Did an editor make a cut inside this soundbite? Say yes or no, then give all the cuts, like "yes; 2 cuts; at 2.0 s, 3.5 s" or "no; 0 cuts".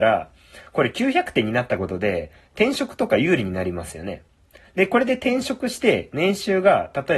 no; 0 cuts